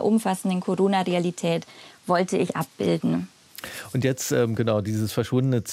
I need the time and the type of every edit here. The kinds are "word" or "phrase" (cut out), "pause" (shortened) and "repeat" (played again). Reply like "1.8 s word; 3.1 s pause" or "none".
none